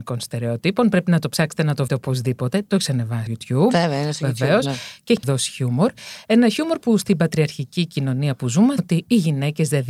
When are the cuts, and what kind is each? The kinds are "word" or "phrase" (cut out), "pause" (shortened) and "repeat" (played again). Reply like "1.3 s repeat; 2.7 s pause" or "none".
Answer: 1.9 s word; 3.3 s word; 5.2 s word; 8.8 s word